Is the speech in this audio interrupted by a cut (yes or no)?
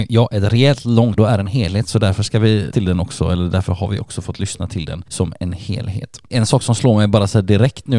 yes